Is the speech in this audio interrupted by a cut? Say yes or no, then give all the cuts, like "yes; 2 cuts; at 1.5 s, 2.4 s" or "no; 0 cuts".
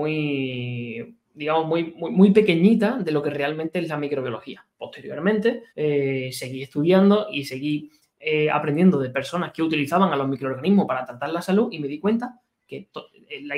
yes; 2 cuts; at 1.2 s, 5.7 s